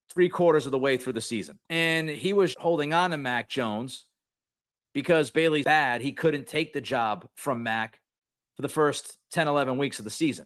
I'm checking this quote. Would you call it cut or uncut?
cut